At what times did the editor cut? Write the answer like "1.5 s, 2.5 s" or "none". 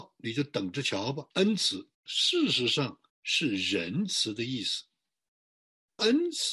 1.3 s, 1.9 s, 3.1 s